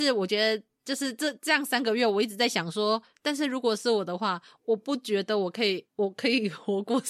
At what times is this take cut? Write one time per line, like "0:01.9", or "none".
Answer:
0:05.9

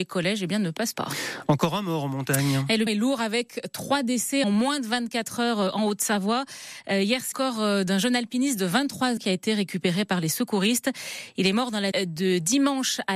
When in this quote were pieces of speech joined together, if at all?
0:00.9
0:02.9
0:04.4
0:07.3
0:09.2
0:11.9

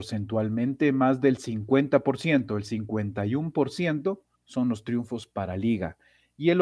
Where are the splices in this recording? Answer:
0:04.3

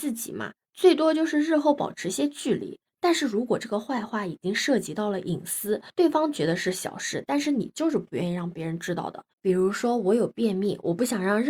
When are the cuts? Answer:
0:09.3

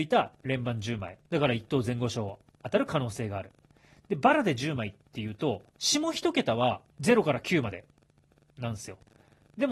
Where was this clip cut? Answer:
0:01.2
0:05.7
0:06.9

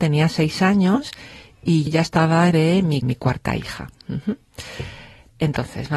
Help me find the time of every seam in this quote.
0:01.9
0:02.5
0:03.0

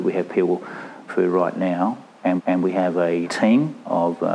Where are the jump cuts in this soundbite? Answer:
0:01.1
0:02.4
0:03.2

